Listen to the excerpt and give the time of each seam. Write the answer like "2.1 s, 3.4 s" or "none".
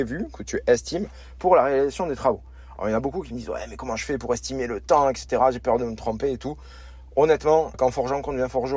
7.7 s

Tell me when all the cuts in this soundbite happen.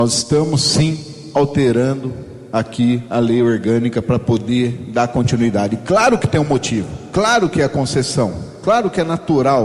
none

